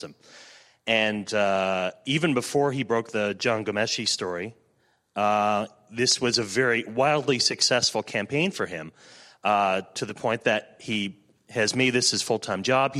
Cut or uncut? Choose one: uncut